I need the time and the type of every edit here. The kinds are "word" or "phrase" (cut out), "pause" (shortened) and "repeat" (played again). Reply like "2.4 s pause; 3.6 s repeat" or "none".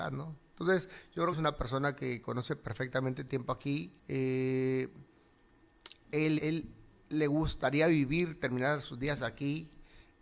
1.3 s phrase; 3.3 s phrase; 4.0 s pause; 6.4 s word